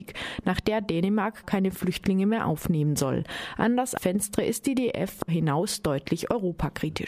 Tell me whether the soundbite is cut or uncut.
cut